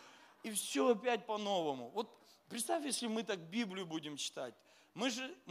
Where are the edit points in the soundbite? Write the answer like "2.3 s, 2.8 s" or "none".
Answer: none